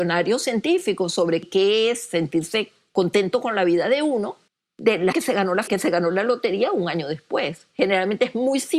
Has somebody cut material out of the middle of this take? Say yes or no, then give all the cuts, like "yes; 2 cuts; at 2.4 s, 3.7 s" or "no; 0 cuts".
yes; 3 cuts; at 4.5 s, 5.1 s, 5.7 s